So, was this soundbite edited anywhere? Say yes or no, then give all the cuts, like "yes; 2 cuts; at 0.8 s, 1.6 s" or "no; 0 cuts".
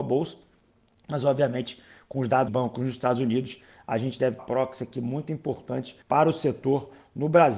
yes; 3 cuts; at 2.5 s, 4.4 s, 6.0 s